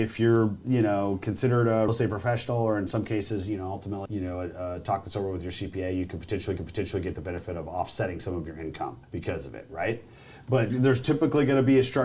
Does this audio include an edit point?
yes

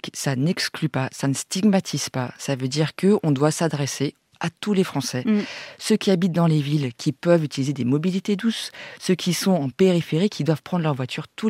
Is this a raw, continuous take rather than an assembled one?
yes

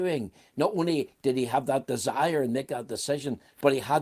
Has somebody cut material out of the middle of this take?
no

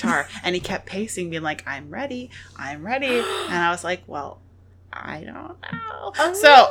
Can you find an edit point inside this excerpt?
no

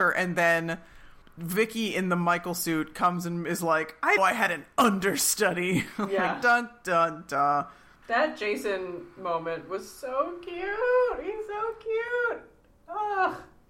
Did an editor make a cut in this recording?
yes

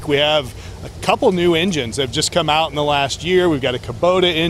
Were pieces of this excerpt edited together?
no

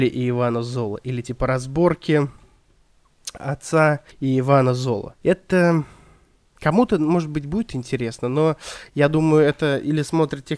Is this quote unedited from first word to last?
no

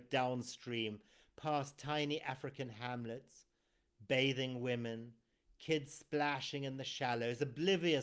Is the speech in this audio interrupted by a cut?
no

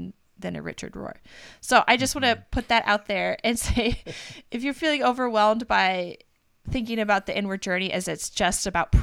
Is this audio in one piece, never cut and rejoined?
yes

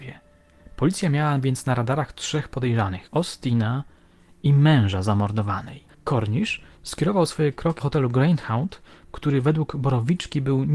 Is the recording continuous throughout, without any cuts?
no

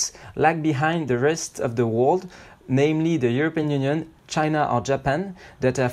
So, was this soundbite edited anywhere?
no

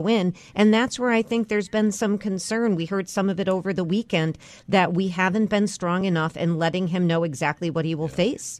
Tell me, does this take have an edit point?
no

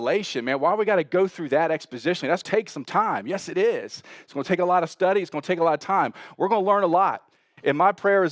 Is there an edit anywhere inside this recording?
yes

